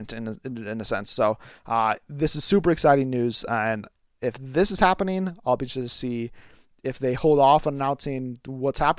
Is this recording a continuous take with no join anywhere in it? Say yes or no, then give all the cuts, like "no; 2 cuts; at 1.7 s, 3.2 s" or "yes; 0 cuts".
yes; 0 cuts